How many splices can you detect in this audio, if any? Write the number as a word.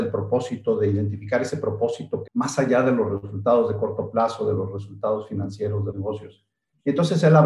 two